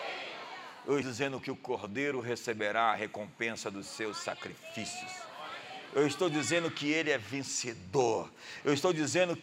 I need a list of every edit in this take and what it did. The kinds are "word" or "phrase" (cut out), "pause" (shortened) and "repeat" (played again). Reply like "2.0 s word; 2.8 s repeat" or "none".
1.0 s word